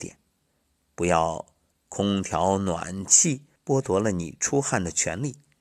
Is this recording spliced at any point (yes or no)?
yes